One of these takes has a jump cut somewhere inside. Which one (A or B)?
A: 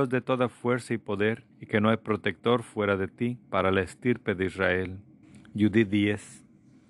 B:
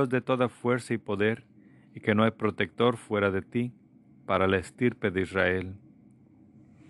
A